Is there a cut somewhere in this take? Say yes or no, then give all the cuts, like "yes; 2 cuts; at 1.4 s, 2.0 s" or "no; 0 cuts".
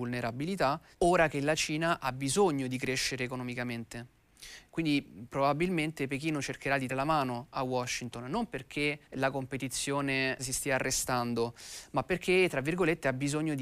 yes; 4 cuts; at 0.9 s, 6.9 s, 9.0 s, 10.4 s